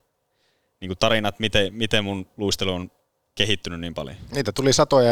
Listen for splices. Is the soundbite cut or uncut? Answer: uncut